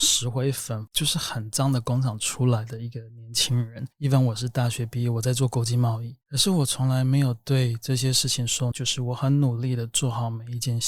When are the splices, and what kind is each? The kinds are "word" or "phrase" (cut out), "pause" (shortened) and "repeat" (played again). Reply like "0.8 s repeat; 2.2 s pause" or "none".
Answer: 3.9 s pause; 6.2 s pause; 8.7 s word